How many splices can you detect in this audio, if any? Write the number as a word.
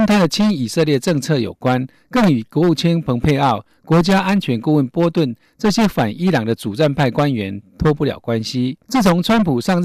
one